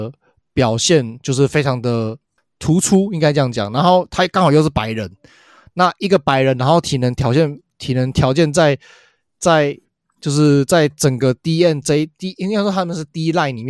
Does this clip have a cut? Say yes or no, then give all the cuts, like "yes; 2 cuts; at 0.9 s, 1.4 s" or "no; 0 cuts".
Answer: no; 0 cuts